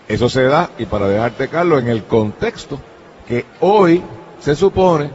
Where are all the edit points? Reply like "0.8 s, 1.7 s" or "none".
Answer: none

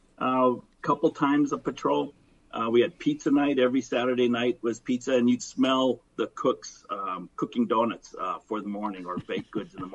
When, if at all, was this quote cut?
5.4 s, 6.1 s, 7.3 s

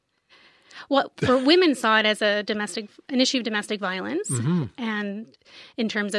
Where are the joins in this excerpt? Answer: none

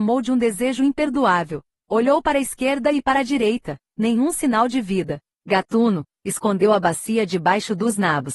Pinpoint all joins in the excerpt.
none

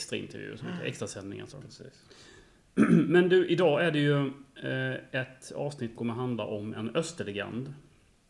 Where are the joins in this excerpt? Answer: 1.5 s, 5.9 s

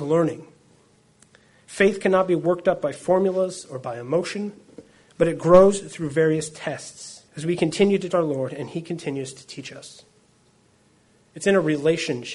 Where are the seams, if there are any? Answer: 5.0 s, 7.3 s, 8.1 s

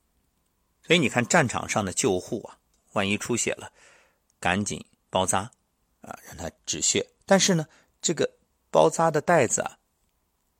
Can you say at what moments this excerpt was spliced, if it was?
6.6 s, 7.2 s

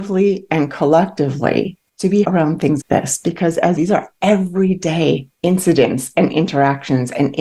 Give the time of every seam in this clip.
1.9 s, 2.2 s, 2.8 s, 3.8 s, 5.3 s

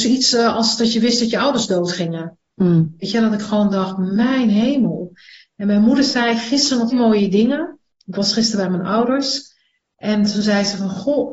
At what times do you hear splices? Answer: 6.9 s

